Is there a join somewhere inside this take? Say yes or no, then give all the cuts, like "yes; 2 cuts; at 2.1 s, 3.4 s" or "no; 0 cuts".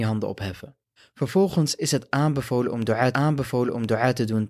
yes; 2 cuts; at 1.0 s, 3.1 s